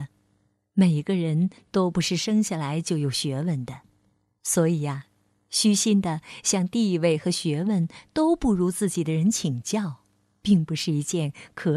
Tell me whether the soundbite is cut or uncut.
uncut